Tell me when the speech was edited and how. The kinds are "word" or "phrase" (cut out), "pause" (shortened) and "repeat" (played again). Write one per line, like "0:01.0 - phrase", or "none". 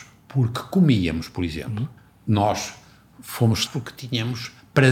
0:02.0 - pause
0:03.7 - word

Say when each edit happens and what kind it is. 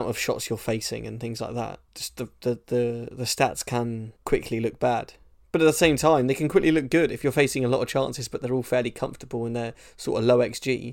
0:01.9 - pause
0:04.2 - pause

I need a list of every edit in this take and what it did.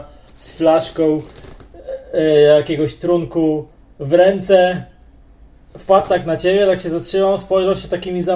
none

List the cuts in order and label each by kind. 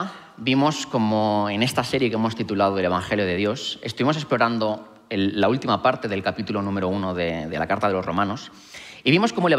none

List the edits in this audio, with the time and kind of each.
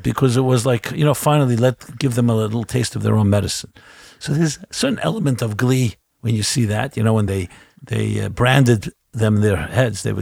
none

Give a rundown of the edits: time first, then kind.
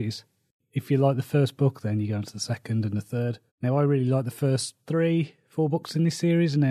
0:03.5 - pause
0:04.8 - pause

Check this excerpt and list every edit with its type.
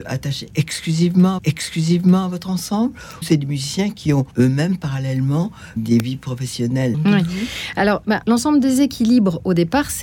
0:01.4 - repeat
0:03.2 - word
0:04.3 - pause
0:05.8 - word
0:06.9 - phrase
0:08.2 - word

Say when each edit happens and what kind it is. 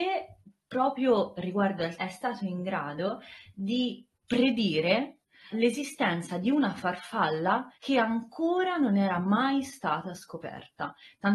0:02.0 - phrase
0:05.5 - word
0:07.7 - pause

